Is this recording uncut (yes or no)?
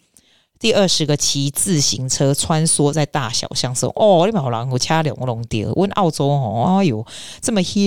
yes